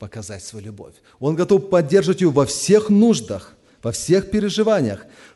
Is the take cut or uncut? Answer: uncut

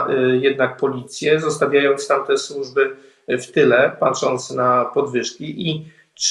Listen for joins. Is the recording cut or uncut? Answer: uncut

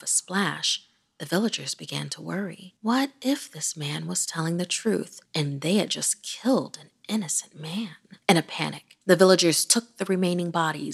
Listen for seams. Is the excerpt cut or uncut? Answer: cut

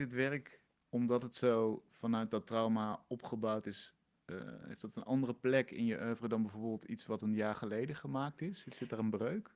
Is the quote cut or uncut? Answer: uncut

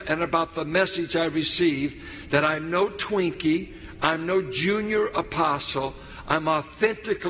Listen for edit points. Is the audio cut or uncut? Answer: uncut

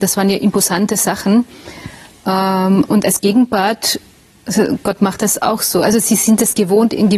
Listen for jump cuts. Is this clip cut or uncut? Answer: uncut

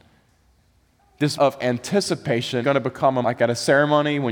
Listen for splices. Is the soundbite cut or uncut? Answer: cut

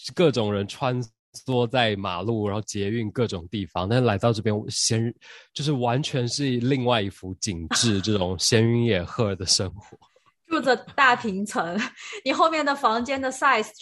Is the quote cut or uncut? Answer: uncut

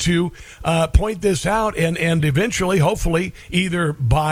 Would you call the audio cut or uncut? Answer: uncut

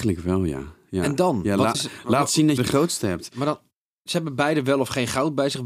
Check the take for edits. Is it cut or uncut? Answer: cut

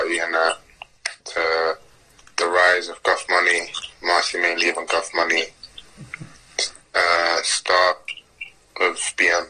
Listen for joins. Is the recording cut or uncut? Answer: uncut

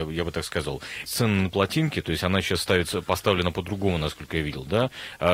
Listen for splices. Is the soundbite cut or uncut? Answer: cut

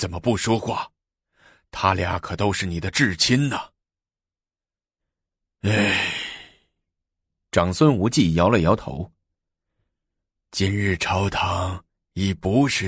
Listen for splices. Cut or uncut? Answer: uncut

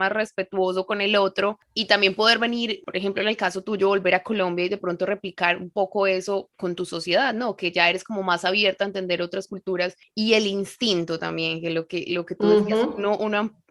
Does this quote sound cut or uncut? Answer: cut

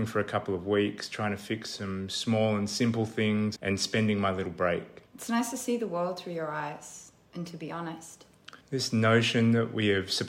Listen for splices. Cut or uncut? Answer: cut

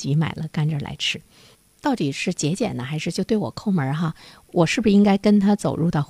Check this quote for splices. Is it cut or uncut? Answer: uncut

